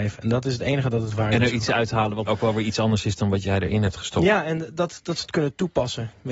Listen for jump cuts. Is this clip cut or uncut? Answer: cut